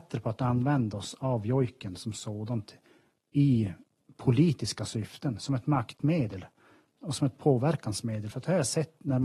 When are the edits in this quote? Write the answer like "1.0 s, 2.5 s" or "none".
none